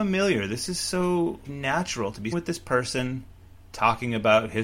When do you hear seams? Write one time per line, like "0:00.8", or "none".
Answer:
0:01.4
0:02.3